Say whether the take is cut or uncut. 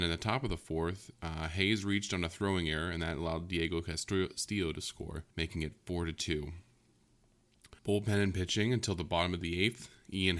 cut